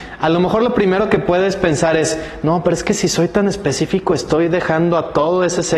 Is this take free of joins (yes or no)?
yes